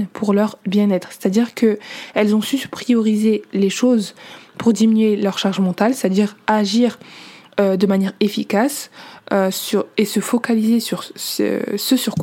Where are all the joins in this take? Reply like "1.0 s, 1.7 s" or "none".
none